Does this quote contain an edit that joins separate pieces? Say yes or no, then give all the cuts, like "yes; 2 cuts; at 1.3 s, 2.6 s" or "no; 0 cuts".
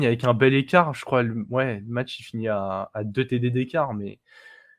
no; 0 cuts